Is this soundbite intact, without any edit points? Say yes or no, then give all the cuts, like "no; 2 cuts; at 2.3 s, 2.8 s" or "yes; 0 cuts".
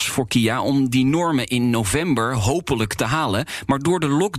yes; 0 cuts